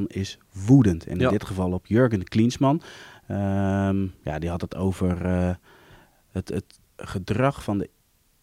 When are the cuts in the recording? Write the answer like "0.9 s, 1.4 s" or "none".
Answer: none